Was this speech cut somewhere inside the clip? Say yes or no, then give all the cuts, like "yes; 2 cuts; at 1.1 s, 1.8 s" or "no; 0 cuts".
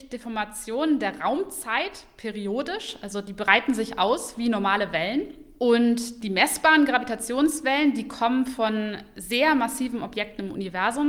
no; 0 cuts